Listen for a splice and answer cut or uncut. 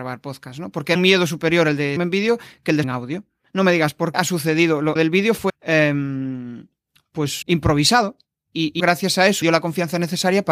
cut